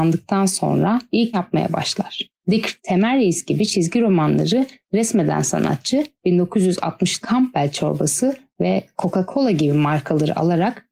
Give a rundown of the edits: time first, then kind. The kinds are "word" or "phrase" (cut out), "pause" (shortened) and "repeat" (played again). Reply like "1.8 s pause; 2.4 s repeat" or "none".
1.3 s word; 2.8 s phrase; 7.2 s word